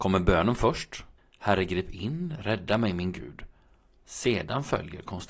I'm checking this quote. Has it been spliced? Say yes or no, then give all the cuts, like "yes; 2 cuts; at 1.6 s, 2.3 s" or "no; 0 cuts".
no; 0 cuts